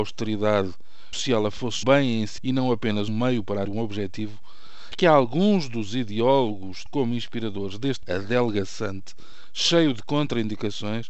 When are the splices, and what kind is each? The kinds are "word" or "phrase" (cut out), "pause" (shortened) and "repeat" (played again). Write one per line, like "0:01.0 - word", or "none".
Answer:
0:01.1 - word
0:01.8 - word
0:02.4 - word
0:03.1 - word
0:03.6 - word
0:04.9 - word
0:06.9 - word
0:08.0 - word